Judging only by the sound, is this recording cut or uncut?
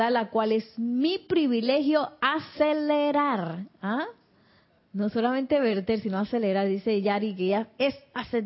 uncut